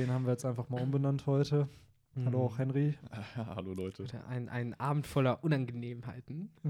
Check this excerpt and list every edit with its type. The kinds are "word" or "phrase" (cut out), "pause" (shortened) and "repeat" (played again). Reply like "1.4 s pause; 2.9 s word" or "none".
none